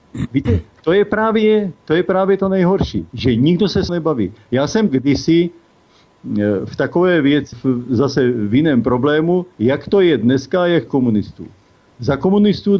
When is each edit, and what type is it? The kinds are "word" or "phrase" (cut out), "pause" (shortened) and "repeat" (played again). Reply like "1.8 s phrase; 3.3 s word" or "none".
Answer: 1.8 s pause; 3.1 s pause; 3.9 s word; 4.9 s phrase; 7.5 s word; 9.5 s pause; 10.9 s phrase